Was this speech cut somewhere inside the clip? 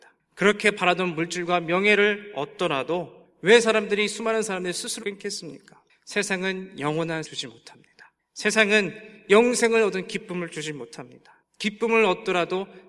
yes; 2 cuts; at 5.0 s, 7.2 s

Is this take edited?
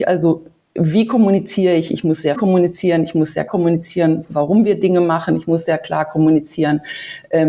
yes; 2 cuts; at 2.3 s, 3.5 s

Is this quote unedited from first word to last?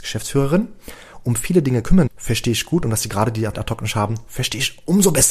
no; 2 cuts; at 2.1 s, 3.5 s

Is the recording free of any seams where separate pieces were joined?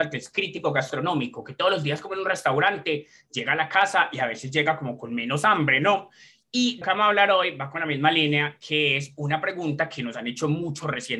no; 1 cut; at 6.8 s

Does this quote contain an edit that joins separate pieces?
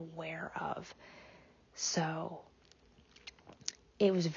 no; 0 cuts

